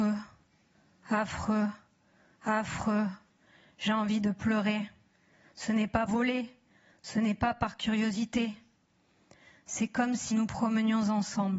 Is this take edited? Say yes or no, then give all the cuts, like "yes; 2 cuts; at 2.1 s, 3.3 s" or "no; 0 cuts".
yes; 2 cuts; at 6.1 s, 10.3 s